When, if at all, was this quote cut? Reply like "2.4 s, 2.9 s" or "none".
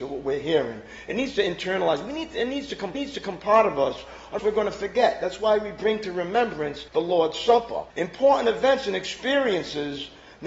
2.9 s, 4.4 s, 6.9 s, 7.9 s